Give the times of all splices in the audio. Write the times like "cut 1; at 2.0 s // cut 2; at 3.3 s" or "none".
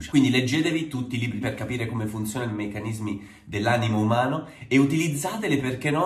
cut 1; at 1.4 s

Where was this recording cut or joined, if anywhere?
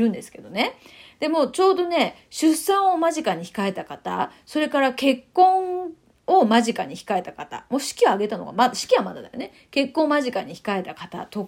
none

